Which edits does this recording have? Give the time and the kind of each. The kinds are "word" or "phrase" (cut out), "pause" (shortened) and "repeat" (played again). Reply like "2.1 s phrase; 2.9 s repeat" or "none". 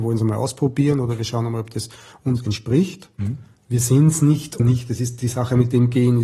4.6 s word